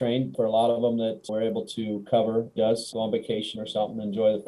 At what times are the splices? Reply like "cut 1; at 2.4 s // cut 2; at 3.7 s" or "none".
cut 1; at 1.3 s // cut 2; at 2.6 s